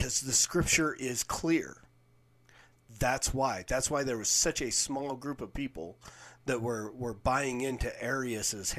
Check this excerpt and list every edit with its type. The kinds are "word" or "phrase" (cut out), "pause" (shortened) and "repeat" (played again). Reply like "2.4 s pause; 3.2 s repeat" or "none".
none